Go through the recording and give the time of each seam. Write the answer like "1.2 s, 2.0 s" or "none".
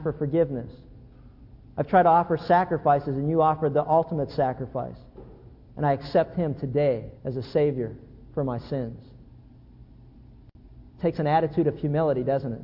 7.2 s